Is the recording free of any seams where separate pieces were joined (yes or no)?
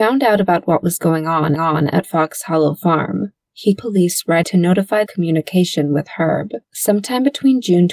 no